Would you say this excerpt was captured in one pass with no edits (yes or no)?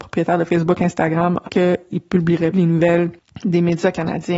no